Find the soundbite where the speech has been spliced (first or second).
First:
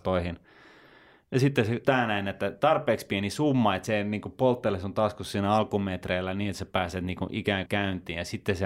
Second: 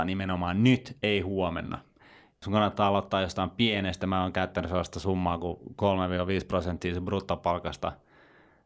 first